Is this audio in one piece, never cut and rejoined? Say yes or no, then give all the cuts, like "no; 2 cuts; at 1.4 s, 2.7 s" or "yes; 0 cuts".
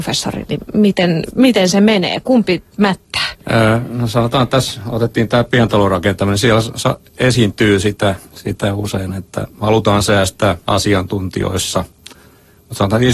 no; 4 cuts; at 3.4 s, 7.1 s, 8.2 s, 10.6 s